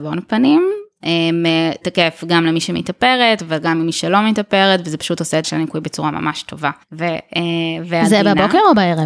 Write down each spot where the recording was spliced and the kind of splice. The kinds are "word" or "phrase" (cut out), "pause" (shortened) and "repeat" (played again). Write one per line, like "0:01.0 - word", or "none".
0:01.8 - word
0:05.4 - word
0:06.8 - pause